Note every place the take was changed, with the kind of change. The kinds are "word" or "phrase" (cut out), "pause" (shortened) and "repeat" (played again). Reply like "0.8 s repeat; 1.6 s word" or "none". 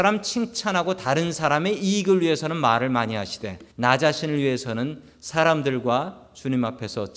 3.7 s pause